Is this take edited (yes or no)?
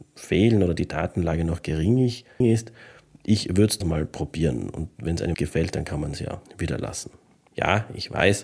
yes